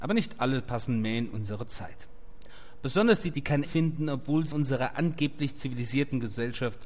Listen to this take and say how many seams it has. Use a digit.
3